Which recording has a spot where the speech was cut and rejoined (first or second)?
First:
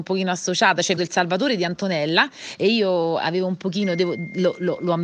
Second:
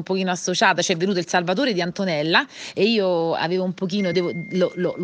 first